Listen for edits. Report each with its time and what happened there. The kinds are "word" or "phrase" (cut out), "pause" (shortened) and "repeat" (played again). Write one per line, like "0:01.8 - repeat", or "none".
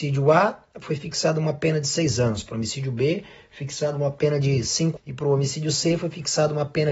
0:05.0 - word